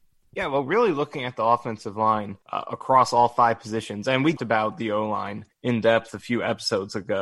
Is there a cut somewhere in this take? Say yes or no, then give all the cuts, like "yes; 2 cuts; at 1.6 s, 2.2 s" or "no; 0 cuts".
yes; 3 cuts; at 2.4 s, 4.4 s, 5.5 s